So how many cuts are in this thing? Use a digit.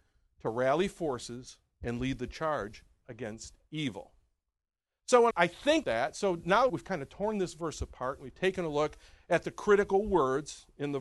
3